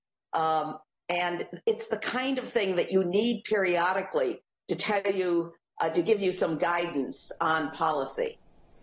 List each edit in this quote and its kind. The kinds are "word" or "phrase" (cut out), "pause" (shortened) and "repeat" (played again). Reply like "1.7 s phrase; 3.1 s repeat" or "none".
none